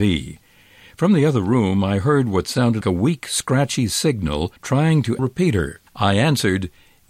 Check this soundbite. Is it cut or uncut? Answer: cut